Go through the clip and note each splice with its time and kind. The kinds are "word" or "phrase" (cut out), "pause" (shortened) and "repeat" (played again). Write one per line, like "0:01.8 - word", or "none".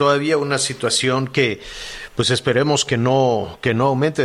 none

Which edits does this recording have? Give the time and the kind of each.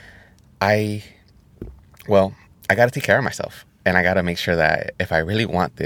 0:02.5 - pause

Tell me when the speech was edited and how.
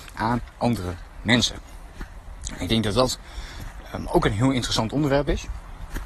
none

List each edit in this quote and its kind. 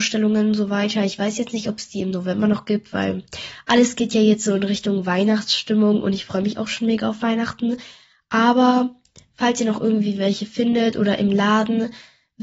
none

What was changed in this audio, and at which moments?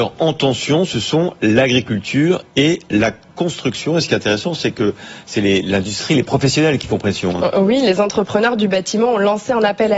none

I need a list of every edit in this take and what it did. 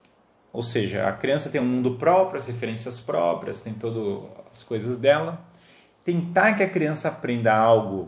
none

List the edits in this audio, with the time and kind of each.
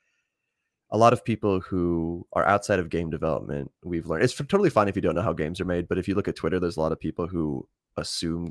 none

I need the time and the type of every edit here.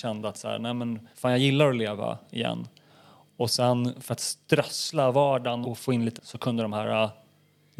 0:01.1 - pause
0:05.6 - word
0:06.2 - word

